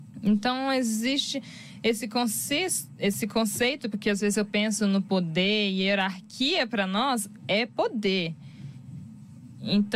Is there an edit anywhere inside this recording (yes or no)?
no